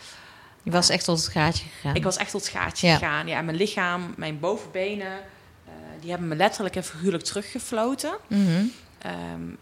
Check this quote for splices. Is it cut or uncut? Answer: uncut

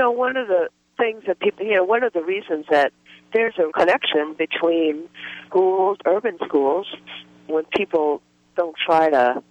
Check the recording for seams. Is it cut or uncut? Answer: cut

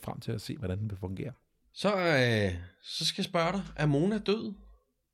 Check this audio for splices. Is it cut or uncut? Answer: uncut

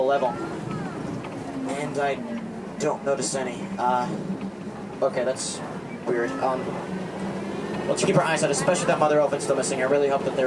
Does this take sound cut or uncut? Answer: cut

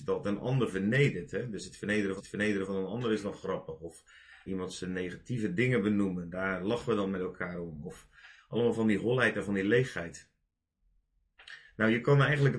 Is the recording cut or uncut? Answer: cut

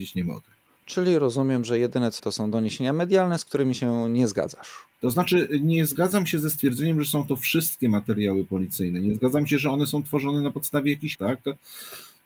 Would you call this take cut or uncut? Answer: cut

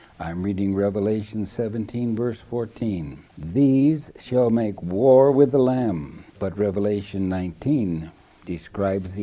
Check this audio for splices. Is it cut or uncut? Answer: cut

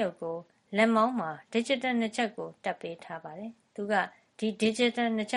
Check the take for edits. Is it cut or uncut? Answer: uncut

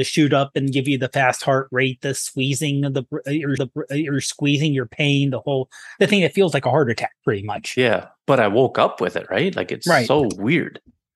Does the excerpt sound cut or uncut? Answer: cut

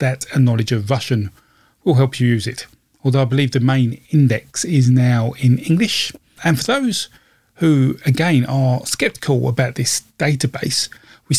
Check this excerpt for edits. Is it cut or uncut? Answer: uncut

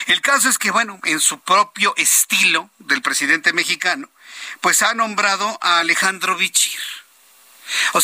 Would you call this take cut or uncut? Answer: uncut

